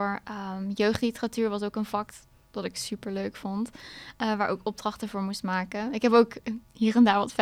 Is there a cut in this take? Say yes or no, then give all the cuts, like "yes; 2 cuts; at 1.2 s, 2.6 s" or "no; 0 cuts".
no; 0 cuts